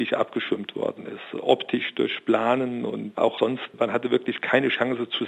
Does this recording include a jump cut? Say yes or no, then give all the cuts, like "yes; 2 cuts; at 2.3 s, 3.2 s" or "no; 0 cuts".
no; 0 cuts